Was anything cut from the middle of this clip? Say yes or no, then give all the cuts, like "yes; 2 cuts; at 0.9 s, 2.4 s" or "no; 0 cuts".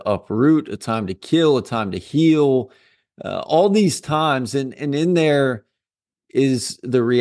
no; 0 cuts